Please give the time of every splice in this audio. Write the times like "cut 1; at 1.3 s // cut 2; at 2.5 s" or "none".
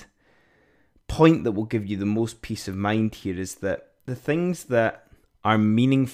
cut 1; at 5.2 s